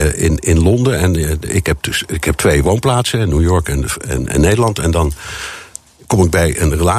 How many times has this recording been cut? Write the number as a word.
zero